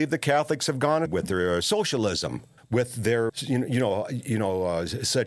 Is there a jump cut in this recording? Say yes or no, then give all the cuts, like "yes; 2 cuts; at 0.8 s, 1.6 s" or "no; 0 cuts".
yes; 3 cuts; at 1.1 s, 2.6 s, 3.3 s